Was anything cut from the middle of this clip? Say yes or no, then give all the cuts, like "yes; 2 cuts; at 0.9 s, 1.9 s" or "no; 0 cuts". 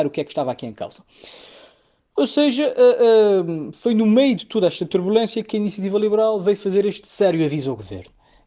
no; 0 cuts